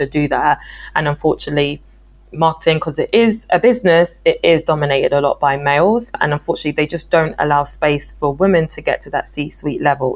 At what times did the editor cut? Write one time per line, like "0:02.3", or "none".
none

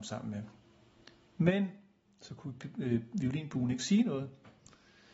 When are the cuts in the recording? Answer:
none

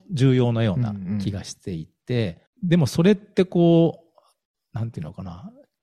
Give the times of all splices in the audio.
0:02.5

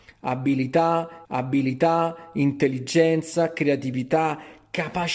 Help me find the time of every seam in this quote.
0:01.2

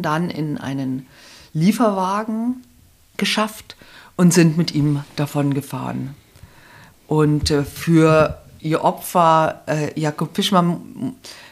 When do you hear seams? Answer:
none

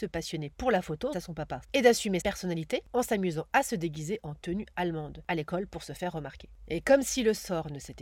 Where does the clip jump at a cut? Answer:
0:01.1
0:01.6
0:02.2

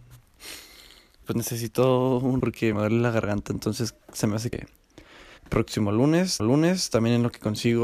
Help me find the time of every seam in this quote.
0:01.2
0:02.4
0:02.7
0:04.0
0:04.5
0:05.4
0:06.4

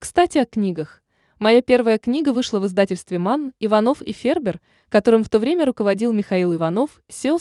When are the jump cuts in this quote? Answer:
none

